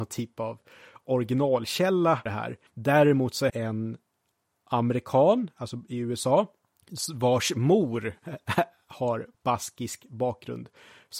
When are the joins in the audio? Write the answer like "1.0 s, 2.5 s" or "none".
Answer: 2.3 s, 2.7 s, 3.5 s, 9.3 s